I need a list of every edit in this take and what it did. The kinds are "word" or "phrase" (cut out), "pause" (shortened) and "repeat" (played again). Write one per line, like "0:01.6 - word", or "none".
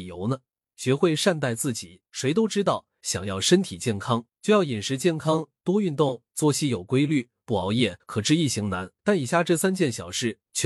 0:02.1 - pause
0:04.3 - pause
0:08.0 - pause
0:09.0 - pause

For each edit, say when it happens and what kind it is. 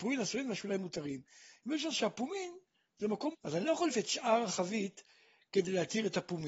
0:01.9 - word
0:03.3 - word
0:03.9 - word

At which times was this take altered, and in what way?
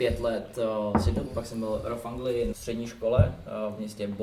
0:01.3 - word
0:02.5 - word

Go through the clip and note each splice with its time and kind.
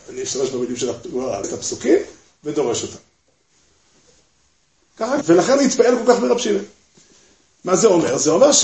0:01.4 - word
0:05.2 - word
0:05.6 - word

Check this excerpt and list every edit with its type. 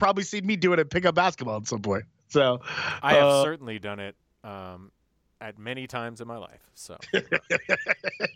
none

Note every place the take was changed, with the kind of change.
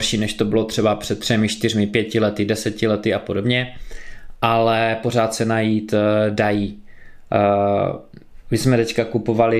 none

